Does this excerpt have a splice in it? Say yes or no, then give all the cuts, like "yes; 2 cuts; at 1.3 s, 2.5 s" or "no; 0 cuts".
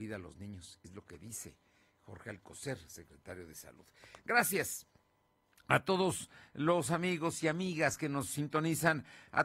no; 0 cuts